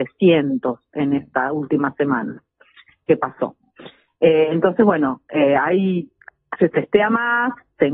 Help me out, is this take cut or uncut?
uncut